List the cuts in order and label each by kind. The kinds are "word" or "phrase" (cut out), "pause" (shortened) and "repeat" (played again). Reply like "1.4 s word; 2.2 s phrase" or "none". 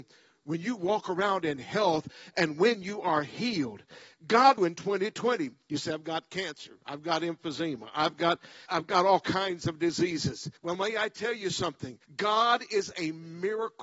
4.6 s phrase; 8.7 s word; 10.6 s pause; 12.0 s pause